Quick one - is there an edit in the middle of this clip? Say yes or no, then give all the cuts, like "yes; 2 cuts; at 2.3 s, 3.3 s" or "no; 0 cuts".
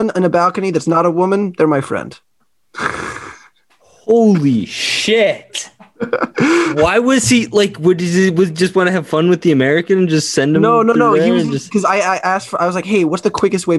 no; 0 cuts